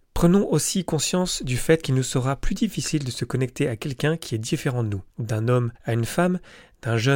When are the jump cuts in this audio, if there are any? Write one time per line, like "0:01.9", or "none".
0:05.1
0:05.8